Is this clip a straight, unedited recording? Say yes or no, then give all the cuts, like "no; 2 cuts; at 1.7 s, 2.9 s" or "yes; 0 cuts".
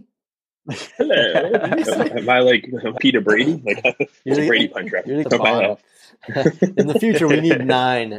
no; 3 cuts; at 0.9 s, 3.0 s, 5.2 s